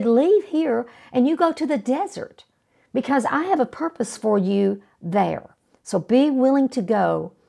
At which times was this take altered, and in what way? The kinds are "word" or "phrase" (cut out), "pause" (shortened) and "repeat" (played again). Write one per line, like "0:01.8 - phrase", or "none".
none